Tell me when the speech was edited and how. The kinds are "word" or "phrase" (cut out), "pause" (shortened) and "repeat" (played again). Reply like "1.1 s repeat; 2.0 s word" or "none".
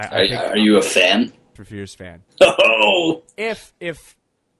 1.6 s phrase; 2.3 s pause